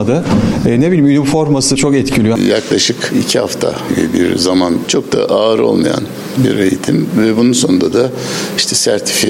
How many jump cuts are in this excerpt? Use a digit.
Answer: 2